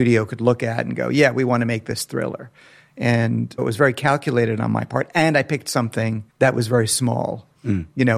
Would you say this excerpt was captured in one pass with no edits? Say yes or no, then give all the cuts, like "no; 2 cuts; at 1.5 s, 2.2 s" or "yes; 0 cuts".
no; 2 cuts; at 3.6 s, 6.3 s